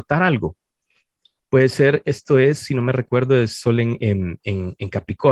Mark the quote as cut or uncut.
uncut